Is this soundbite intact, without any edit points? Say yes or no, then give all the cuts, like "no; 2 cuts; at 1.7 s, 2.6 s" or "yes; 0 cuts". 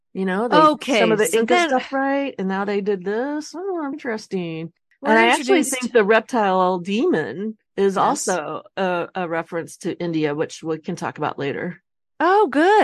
no; 2 cuts; at 3.9 s, 7.7 s